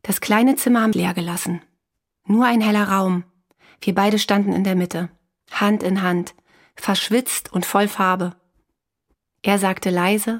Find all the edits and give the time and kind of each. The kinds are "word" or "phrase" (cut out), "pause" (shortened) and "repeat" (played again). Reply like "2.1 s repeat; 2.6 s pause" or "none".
0.9 s phrase